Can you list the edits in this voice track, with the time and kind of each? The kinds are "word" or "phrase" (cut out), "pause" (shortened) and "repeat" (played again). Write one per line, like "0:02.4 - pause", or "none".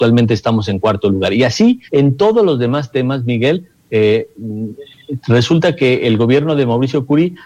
0:01.9 - pause